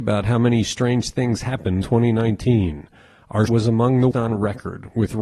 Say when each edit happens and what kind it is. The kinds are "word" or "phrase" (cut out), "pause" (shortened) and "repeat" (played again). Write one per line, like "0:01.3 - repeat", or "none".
0:01.8 - word
0:03.5 - word
0:04.1 - word